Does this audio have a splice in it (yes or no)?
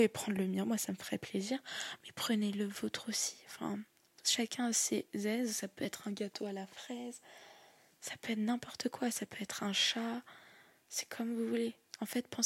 no